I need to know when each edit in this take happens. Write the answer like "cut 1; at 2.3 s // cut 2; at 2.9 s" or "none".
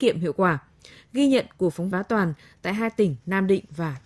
cut 1; at 1.9 s